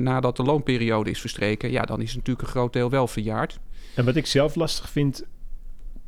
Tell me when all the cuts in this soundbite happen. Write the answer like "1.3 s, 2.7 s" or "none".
none